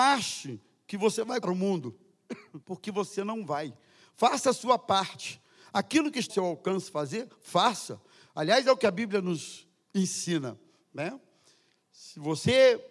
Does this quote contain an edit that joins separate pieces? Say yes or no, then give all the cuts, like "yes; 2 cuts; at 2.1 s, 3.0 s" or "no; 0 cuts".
yes; 3 cuts; at 1.4 s, 2.6 s, 6.3 s